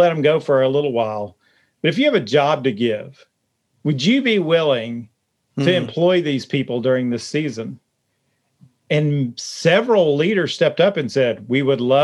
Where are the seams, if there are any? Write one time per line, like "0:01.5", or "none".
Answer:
none